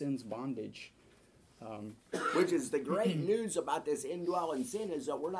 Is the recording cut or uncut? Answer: cut